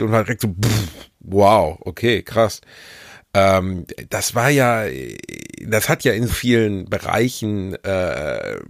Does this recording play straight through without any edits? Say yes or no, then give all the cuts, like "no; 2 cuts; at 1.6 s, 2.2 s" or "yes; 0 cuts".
no; 1 cut; at 6.3 s